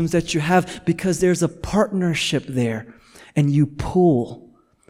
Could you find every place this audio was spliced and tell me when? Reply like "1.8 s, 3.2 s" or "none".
none